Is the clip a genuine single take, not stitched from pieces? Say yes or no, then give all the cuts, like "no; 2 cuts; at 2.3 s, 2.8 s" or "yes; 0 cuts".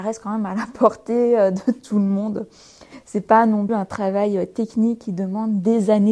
no; 1 cut; at 3.7 s